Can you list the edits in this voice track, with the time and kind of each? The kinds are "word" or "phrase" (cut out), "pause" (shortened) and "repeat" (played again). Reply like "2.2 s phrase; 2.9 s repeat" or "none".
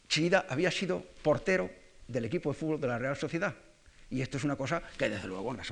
none